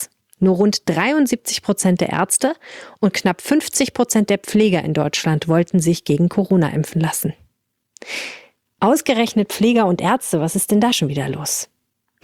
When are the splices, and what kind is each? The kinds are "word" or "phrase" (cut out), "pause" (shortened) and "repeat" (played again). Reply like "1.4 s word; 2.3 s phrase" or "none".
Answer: none